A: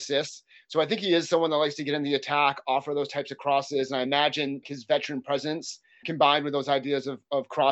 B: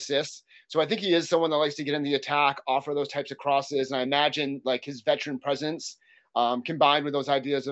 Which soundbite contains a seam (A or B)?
A